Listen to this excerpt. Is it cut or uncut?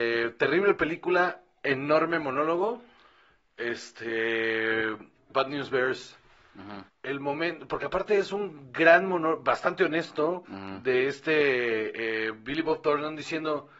cut